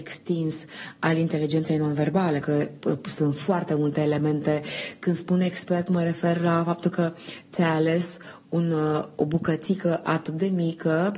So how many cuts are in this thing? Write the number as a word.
one